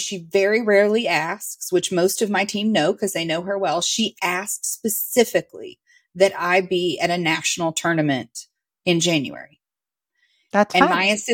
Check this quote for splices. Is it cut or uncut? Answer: uncut